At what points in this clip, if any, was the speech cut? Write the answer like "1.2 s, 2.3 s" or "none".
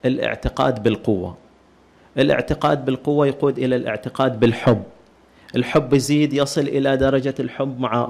none

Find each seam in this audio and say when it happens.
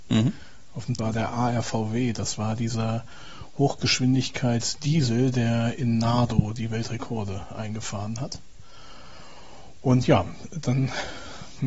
1.0 s

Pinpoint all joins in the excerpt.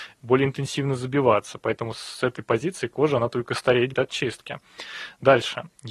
3.9 s

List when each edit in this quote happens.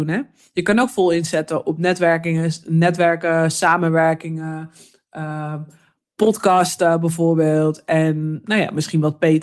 none

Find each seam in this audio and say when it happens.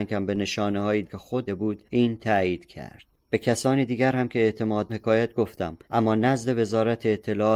1.0 s, 1.5 s, 3.1 s, 4.9 s, 5.8 s

